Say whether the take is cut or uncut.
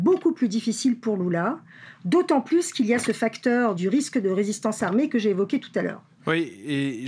uncut